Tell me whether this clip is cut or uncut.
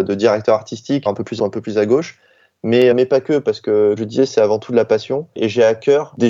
cut